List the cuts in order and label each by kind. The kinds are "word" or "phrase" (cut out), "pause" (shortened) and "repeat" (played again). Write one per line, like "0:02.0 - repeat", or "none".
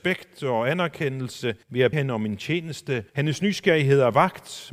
0:01.6 - pause
0:01.9 - word
0:03.1 - pause